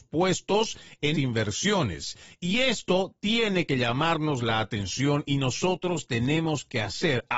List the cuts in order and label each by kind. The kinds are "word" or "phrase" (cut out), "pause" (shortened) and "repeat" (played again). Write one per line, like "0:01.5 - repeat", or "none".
0:01.1 - word